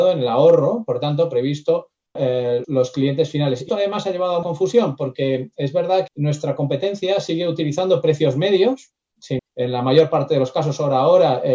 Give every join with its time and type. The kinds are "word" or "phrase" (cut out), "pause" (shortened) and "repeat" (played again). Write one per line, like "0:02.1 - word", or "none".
0:02.2 - word
0:02.6 - word
0:03.7 - word
0:04.4 - word
0:06.1 - word
0:09.4 - word